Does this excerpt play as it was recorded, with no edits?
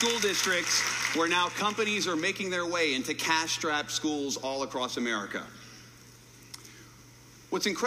yes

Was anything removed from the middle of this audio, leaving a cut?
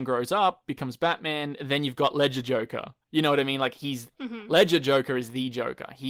yes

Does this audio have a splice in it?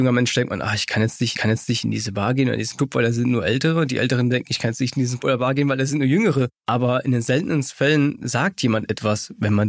yes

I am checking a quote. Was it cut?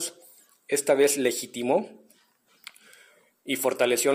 no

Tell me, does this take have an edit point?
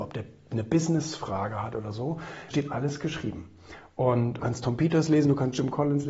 yes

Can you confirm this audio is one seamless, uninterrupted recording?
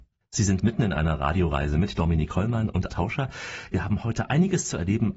no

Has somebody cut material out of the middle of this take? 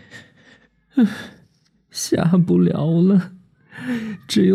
no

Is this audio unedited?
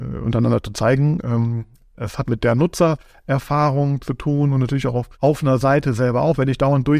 no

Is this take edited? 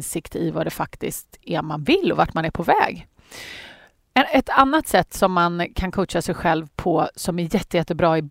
no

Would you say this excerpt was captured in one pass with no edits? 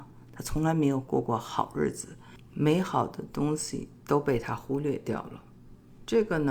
no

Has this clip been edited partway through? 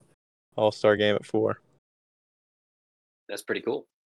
no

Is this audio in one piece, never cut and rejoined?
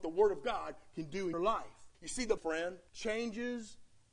no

